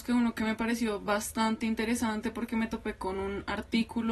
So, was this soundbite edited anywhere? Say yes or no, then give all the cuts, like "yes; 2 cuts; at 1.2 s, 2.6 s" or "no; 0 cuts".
no; 0 cuts